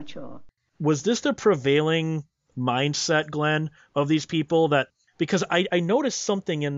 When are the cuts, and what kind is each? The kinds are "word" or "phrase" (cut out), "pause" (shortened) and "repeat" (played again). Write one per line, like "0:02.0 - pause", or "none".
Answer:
none

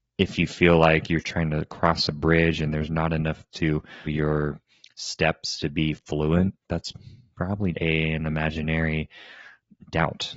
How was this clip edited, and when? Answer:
0:03.5 - word
0:04.1 - word
0:06.6 - pause
0:07.7 - word

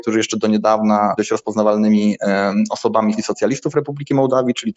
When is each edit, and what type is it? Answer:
0:01.2 - word
0:03.1 - phrase

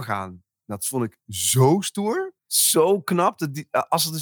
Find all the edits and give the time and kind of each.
0:02.4 - pause

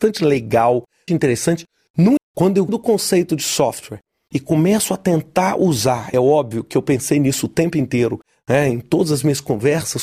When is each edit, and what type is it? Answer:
0:01.1 - word
0:02.2 - word
0:02.7 - word
0:06.1 - word

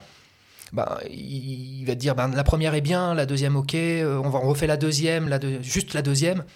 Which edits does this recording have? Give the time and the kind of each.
none

